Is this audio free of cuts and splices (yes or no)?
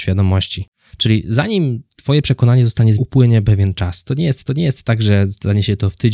no